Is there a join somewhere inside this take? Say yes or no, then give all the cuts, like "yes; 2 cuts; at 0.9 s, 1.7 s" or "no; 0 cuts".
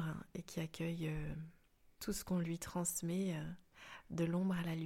no; 0 cuts